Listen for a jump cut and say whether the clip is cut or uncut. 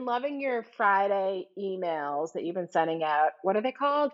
uncut